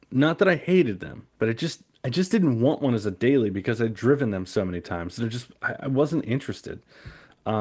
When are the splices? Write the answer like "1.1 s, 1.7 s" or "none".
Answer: 1.3 s